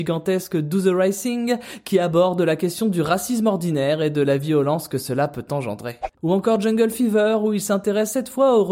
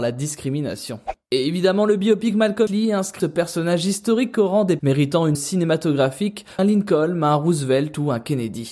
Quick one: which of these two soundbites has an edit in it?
second; 5 cuts; at 2.7 s, 3.2 s, 4.8 s, 5.3 s, 6.6 s

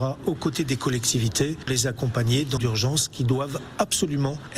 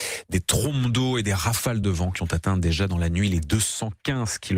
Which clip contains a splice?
first; 2 cuts; at 1.7 s, 2.6 s

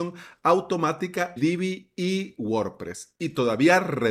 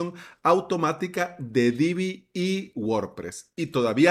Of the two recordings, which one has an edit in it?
first; 1 cut; at 1.4 s

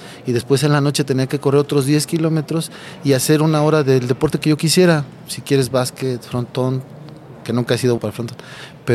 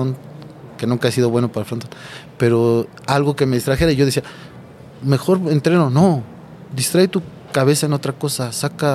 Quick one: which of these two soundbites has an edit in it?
first; 1 cut; at 8.0 s

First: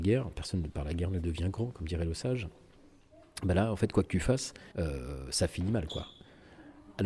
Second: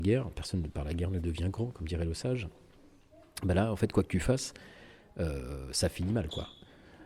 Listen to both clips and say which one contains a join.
first; 1 cut; at 4.7 s

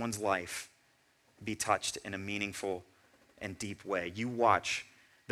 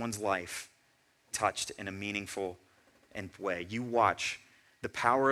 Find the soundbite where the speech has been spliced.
second; 2 cuts; at 1.3 s, 3.3 s

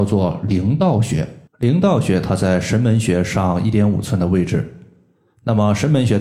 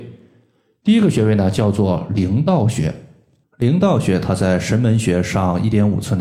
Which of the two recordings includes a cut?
first; 1 cut; at 1.5 s

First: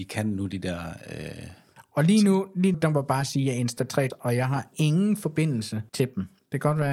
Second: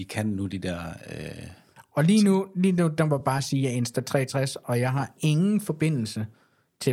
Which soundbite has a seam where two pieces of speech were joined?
first; 3 cuts; at 2.7 s, 4.1 s, 5.9 s

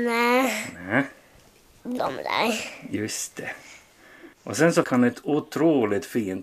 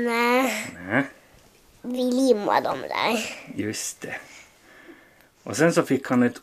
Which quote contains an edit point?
first; 3 cuts; at 2.0 s, 4.3 s, 4.8 s

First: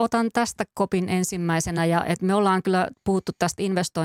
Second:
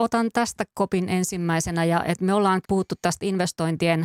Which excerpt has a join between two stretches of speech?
second; 1 cut; at 2.6 s

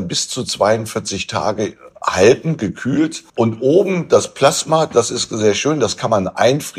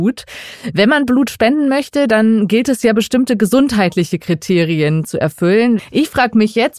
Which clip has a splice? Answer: first; 1 cut; at 3.3 s

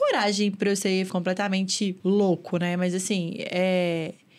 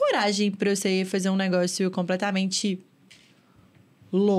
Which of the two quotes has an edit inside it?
first; 2 cuts; at 1.1 s, 2.0 s

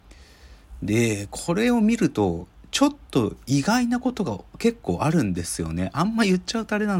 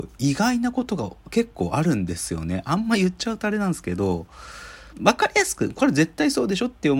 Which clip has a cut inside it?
second; 1 cut; at 4.9 s

